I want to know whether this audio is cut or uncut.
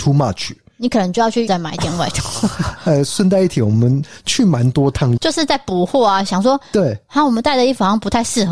cut